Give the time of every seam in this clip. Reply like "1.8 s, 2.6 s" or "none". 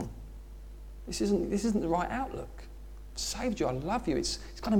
none